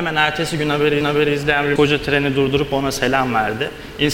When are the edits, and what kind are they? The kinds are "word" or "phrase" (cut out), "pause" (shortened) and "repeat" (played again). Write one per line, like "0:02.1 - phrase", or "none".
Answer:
0:01.0 - repeat
0:01.8 - word